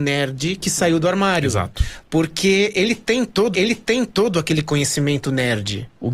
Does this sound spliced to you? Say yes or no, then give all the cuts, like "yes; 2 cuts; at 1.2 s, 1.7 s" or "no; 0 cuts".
yes; 1 cut; at 3.5 s